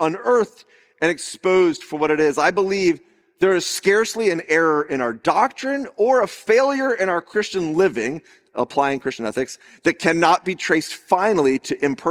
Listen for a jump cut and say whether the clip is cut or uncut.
uncut